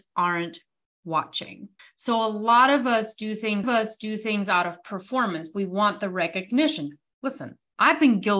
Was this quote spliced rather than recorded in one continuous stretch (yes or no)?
yes